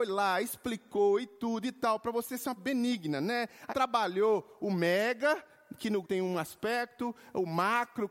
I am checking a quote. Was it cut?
yes; 3 cuts; at 2.6 s, 3.7 s, 6.0 s

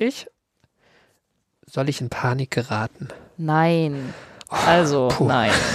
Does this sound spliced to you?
yes; 1 cut; at 3.3 s

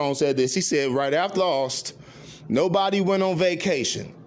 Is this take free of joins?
no; 1 cut; at 1.3 s

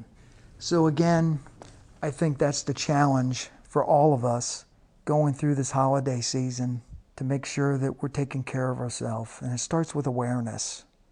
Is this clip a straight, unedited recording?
yes; 0 cuts

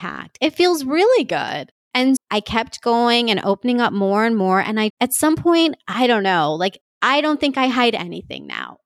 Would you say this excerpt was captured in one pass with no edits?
no; 2 cuts; at 2.2 s, 4.9 s

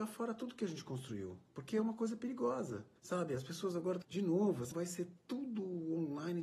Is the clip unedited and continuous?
no; 3 cuts; at 3.0 s, 4.0 s, 4.7 s

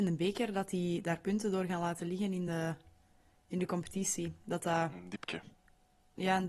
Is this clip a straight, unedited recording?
yes; 0 cuts

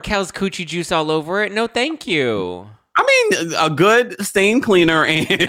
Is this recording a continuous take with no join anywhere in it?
yes; 0 cuts

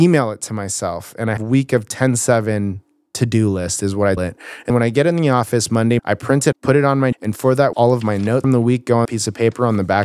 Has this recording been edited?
yes; 9 cuts; at 1.4 s, 4.2 s, 4.7 s, 6.0 s, 6.5 s, 7.1 s, 7.7 s, 8.4 s, 9.0 s

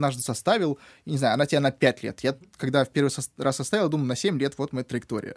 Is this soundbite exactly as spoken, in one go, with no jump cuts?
yes; 0 cuts

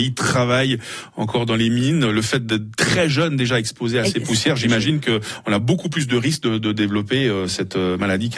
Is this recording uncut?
yes; 0 cuts

